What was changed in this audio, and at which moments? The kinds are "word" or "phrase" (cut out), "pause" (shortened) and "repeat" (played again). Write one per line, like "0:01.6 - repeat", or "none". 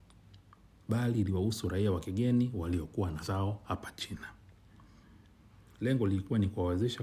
0:03.2 - word